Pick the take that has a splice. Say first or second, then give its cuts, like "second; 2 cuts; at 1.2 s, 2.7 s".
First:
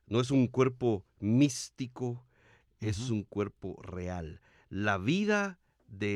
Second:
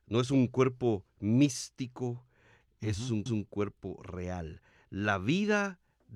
second; 1 cut; at 3.3 s